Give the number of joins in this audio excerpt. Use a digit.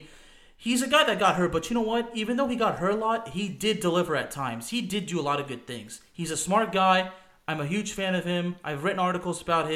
0